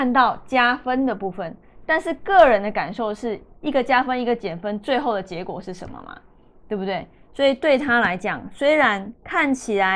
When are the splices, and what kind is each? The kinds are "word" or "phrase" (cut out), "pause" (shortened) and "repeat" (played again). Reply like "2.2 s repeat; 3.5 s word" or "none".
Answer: none